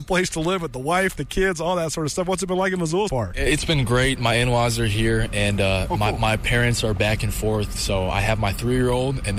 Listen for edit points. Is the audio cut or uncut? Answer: cut